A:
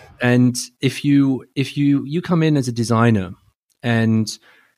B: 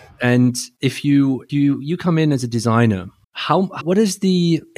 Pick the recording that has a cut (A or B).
B